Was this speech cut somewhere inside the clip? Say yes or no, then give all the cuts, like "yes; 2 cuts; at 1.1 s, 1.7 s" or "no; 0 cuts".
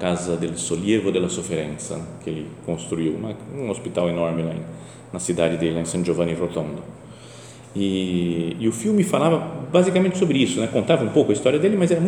no; 0 cuts